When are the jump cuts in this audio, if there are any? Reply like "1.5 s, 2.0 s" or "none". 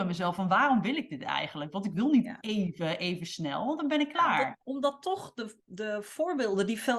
4.6 s